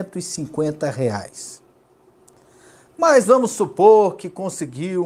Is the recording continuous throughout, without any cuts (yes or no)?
yes